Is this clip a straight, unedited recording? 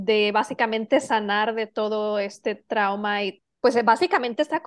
yes; 0 cuts

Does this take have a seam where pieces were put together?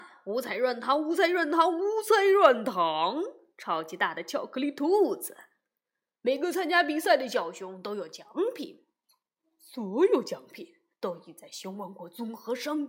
no; 0 cuts

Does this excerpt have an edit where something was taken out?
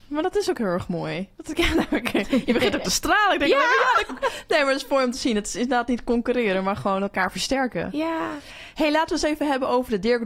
yes; 2 cuts; at 1.3 s, 4.1 s

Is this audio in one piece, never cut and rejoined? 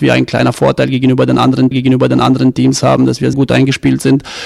no; 2 cuts; at 1.7 s, 3.3 s

